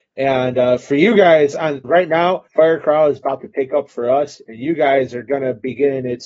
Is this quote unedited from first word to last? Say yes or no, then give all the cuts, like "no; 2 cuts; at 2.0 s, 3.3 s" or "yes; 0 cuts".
no; 2 cuts; at 1.8 s, 2.5 s